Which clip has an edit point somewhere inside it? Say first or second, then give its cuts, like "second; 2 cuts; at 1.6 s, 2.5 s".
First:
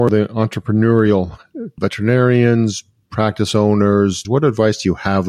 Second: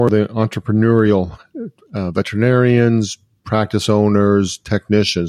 first; 2 cuts; at 1.8 s, 4.2 s